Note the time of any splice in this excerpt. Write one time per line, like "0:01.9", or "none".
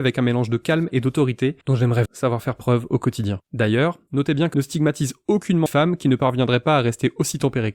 0:01.6
0:02.1
0:03.4
0:04.5
0:05.7